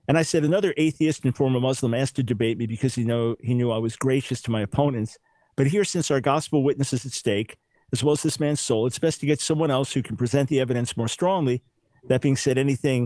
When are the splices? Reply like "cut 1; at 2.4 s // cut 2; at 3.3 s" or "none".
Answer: none